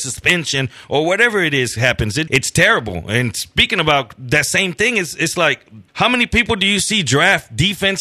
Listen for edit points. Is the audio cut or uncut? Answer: cut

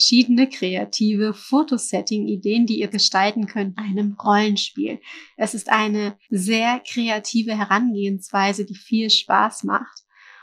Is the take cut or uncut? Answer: cut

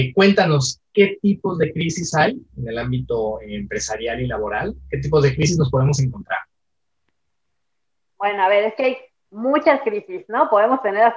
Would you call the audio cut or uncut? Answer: uncut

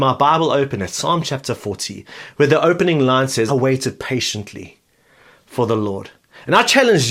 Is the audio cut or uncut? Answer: cut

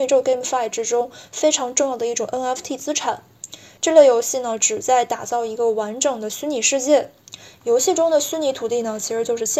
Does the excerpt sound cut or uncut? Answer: uncut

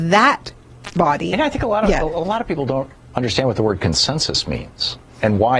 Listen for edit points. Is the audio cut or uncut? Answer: uncut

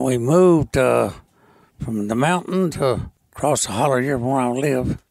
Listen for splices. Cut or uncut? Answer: cut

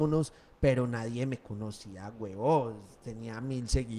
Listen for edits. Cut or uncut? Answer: uncut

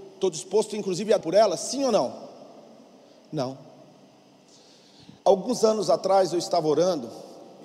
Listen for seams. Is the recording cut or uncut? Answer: cut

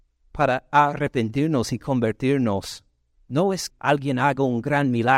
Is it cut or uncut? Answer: cut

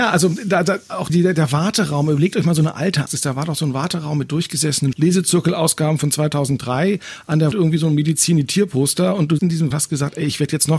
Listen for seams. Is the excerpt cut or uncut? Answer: cut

